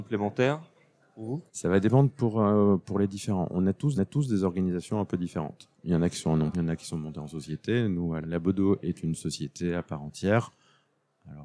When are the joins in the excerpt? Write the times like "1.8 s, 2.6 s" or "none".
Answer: 1.5 s, 2.8 s, 4.0 s, 5.7 s, 6.5 s, 8.2 s